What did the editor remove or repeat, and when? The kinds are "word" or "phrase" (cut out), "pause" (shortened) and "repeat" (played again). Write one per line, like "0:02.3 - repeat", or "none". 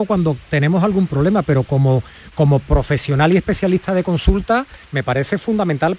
0:04.8 - pause